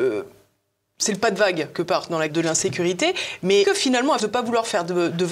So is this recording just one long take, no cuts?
no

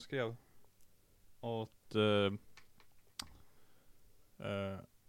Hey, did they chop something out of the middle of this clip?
no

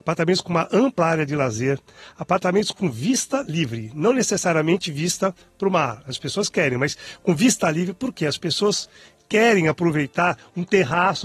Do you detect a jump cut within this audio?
no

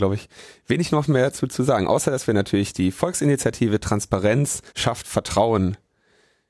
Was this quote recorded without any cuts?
no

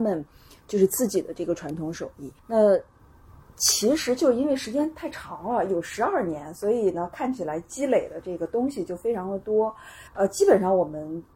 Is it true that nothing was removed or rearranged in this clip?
no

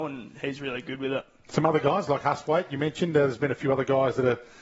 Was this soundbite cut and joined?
no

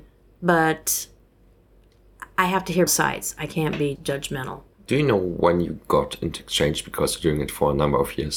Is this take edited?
yes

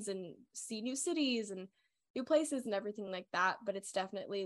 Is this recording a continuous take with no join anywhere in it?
yes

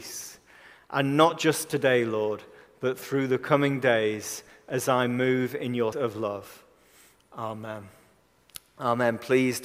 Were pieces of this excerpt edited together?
yes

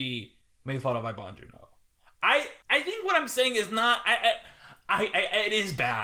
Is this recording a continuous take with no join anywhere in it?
no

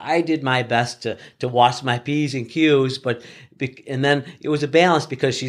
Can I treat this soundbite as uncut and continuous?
yes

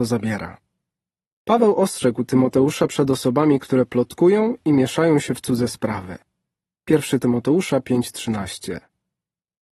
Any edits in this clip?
no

